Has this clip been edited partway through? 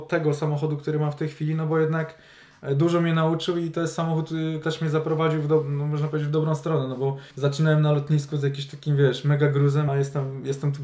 yes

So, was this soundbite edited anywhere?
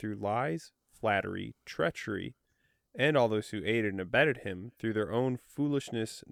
no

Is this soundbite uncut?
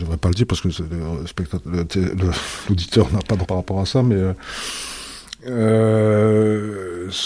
no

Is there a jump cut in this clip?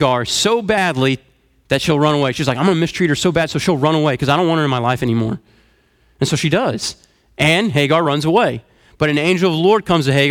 no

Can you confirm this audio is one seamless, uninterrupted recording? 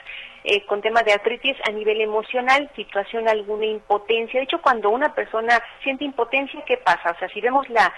no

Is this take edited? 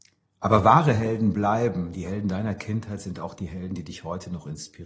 no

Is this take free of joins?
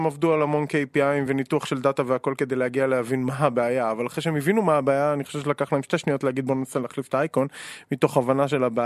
yes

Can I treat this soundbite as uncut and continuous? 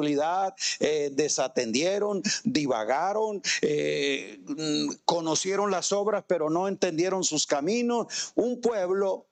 yes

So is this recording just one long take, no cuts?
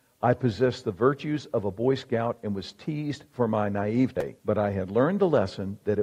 no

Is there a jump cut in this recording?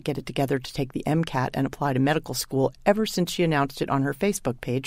no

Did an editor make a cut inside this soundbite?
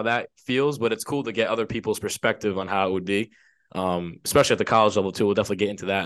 no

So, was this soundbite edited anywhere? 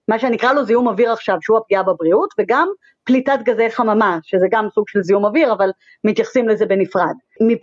no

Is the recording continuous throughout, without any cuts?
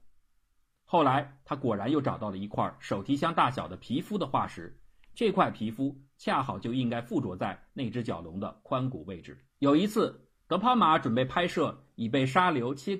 no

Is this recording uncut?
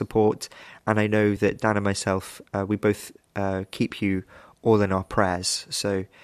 yes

